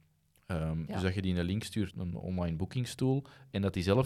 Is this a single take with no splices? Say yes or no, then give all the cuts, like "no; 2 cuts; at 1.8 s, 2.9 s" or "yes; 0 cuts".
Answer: no; 1 cut; at 1.9 s